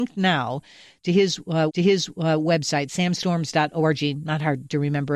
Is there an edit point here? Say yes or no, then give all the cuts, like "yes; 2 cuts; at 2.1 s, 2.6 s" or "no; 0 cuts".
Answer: yes; 1 cut; at 1.7 s